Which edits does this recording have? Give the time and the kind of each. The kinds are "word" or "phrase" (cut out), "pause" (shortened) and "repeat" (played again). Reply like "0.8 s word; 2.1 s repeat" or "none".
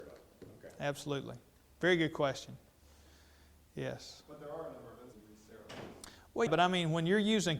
6.5 s word